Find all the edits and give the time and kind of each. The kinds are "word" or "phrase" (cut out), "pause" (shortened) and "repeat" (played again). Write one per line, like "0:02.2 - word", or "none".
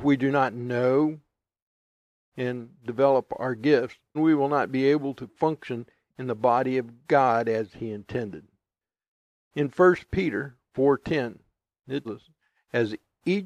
0:04.1 - word
0:12.0 - word